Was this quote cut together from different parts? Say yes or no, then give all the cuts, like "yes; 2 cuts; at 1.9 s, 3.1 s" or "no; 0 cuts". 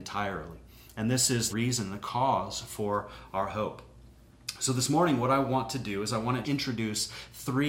yes; 2 cuts; at 1.5 s, 6.4 s